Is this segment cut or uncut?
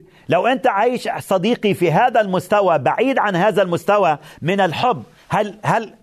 uncut